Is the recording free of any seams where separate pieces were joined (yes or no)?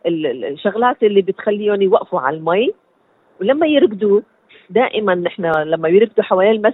yes